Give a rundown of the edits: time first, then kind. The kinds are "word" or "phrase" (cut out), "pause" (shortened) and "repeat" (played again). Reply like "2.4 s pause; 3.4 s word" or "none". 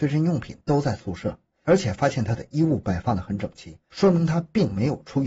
3.8 s pause